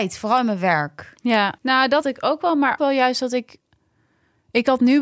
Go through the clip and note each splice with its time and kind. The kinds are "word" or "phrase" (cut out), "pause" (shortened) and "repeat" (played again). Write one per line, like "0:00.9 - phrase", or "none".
0:01.6 - pause
0:02.0 - word
0:02.8 - phrase